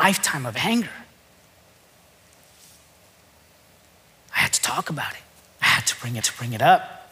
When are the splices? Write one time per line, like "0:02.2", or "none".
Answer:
0:06.2